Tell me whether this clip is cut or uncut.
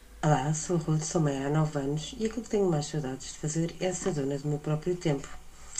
uncut